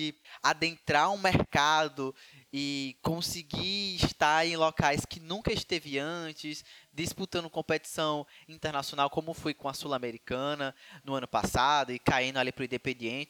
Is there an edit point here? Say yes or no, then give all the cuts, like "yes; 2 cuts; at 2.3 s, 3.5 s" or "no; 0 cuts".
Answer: no; 0 cuts